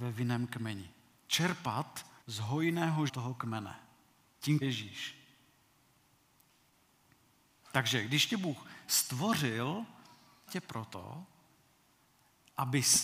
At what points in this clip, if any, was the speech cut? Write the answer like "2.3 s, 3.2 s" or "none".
2.2 s, 3.1 s, 4.6 s, 10.5 s